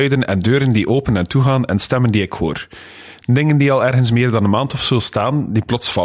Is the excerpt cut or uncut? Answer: uncut